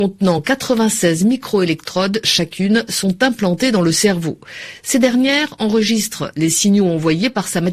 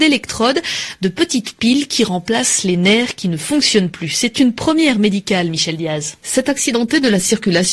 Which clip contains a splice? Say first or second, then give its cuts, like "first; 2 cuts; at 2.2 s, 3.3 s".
second; 1 cut; at 6.2 s